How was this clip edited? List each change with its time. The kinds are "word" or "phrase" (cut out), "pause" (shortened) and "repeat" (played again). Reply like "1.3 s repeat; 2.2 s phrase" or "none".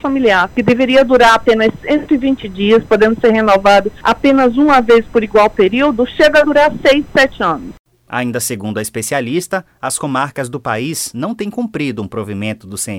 none